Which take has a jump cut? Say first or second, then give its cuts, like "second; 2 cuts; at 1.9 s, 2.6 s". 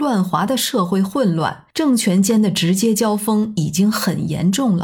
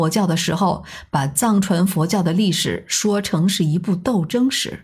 first; 1 cut; at 1.7 s